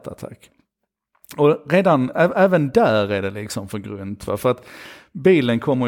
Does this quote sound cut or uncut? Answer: uncut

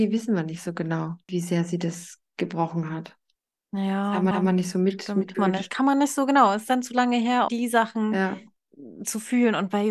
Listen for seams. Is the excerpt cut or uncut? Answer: cut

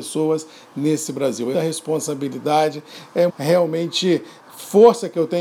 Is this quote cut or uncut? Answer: cut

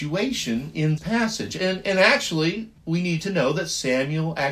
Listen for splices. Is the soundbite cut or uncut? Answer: cut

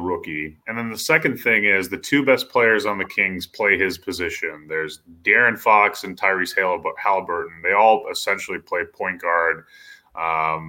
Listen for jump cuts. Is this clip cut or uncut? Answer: uncut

